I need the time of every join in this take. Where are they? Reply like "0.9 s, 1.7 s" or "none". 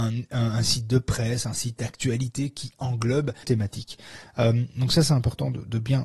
3.4 s